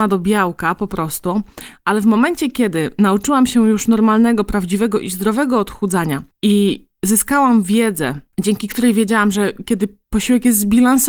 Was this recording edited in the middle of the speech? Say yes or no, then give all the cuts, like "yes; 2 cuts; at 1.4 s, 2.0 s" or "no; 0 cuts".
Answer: no; 0 cuts